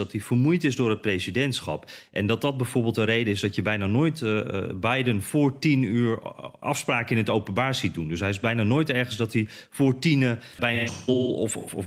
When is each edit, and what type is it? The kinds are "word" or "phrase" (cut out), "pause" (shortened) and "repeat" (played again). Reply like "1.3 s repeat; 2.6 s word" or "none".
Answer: 6.6 s word; 10.6 s word